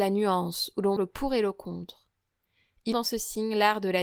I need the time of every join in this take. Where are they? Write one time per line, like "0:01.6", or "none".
0:01.0
0:02.9